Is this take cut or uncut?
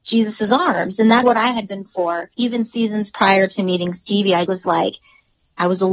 cut